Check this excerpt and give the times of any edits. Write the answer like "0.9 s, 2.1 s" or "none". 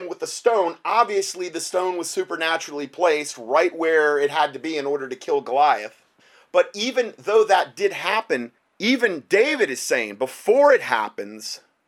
6.2 s, 8.6 s